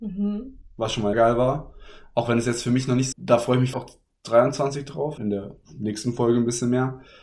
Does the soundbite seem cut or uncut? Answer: cut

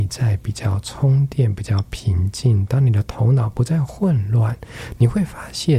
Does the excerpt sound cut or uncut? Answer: uncut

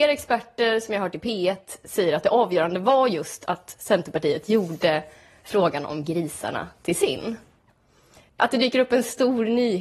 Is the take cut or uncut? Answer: uncut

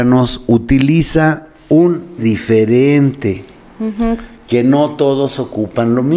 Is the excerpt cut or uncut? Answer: cut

